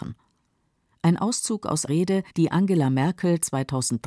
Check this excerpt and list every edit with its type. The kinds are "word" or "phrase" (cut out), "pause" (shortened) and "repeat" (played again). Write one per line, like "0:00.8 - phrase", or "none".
0:01.9 - word
0:02.3 - pause